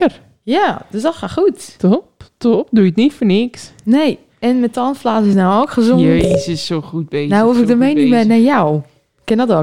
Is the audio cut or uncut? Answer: uncut